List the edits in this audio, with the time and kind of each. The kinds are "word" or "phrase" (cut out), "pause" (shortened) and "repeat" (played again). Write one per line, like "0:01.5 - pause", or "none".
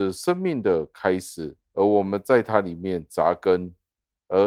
0:01.7 - pause